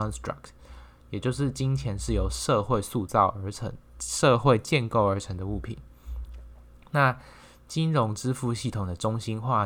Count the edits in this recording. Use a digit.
0